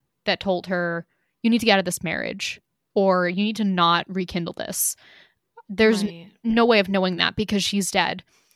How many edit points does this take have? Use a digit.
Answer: 0